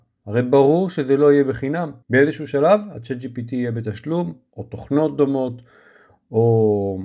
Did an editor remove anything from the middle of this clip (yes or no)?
yes